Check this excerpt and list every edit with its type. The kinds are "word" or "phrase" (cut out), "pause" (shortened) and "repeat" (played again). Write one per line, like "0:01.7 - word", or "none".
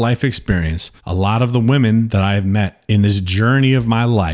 0:01.0 - pause